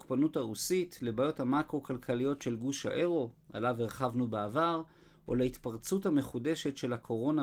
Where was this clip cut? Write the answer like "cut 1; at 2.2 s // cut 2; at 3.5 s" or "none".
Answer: none

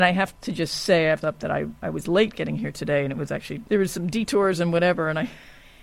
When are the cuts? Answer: cut 1; at 1.2 s

